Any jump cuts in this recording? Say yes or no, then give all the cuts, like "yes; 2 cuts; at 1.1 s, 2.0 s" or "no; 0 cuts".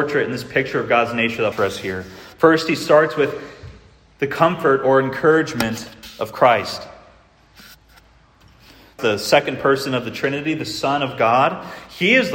yes; 2 cuts; at 1.5 s, 9.0 s